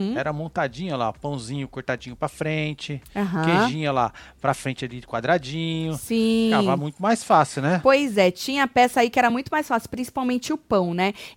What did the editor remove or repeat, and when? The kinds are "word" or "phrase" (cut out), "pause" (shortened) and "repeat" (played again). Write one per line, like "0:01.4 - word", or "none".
none

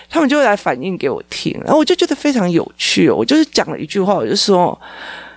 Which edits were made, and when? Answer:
none

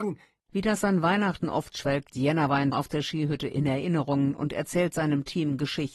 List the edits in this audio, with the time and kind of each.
0:01.7 - phrase
0:02.7 - word

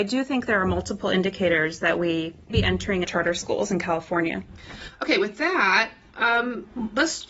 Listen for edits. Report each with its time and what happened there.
0:02.5 - word
0:03.0 - phrase

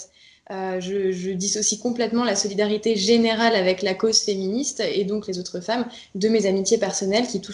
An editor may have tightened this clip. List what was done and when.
none

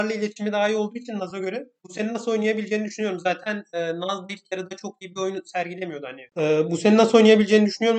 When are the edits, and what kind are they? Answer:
none

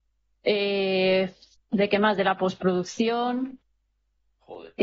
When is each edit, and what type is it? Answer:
none

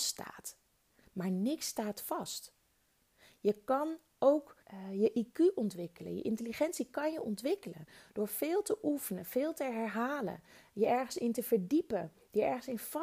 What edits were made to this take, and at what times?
0:04.6 - pause

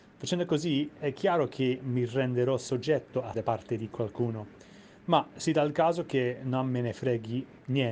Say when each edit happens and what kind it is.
0:03.3 - word

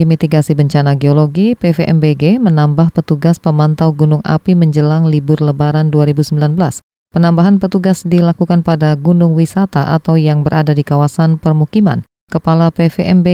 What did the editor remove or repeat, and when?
none

